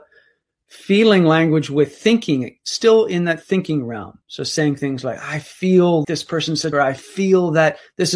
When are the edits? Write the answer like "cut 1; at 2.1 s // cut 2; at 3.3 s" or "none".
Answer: cut 1; at 4.2 s // cut 2; at 6.0 s // cut 3; at 6.7 s